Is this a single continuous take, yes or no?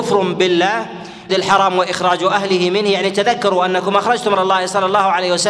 no